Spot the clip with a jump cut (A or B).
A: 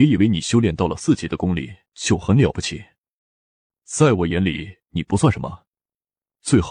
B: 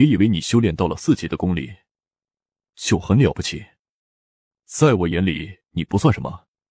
A